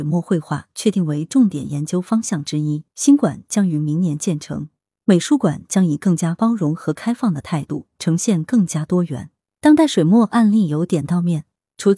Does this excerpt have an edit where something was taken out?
yes; 1 cut; at 2.9 s

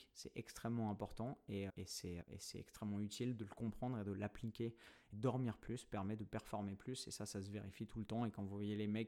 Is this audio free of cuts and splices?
no; 3 cuts; at 1.7 s, 2.2 s, 5.1 s

